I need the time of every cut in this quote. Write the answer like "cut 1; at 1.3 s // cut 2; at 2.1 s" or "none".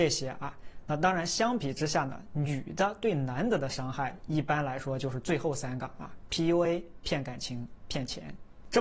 none